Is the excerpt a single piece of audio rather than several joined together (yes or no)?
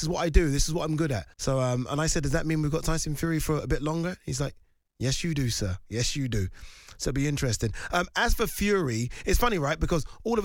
no